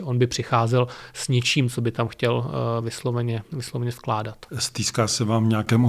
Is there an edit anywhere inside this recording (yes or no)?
no